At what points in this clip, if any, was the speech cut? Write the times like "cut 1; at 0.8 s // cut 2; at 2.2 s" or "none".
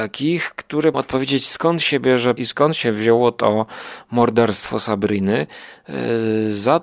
cut 1; at 0.9 s // cut 2; at 2.4 s